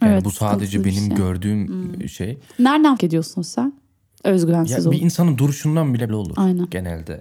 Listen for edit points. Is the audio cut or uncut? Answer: cut